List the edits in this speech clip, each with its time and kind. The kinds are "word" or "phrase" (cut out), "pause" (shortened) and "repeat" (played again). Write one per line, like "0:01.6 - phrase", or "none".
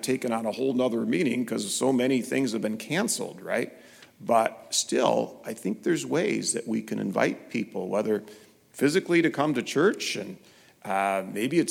none